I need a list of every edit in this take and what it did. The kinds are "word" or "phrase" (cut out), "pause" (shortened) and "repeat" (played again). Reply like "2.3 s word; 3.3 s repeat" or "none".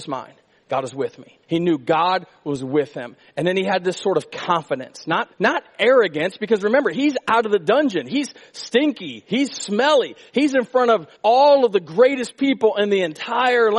1.4 s pause; 5.3 s pause; 11.2 s pause